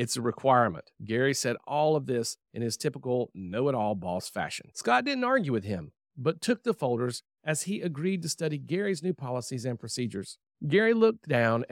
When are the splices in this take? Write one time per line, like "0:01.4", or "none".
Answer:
0:00.9
0:10.5